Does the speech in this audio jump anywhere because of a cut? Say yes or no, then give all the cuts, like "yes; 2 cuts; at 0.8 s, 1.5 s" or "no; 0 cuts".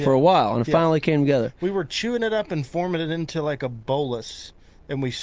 no; 0 cuts